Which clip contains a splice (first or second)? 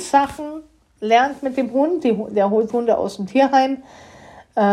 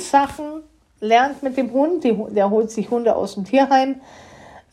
first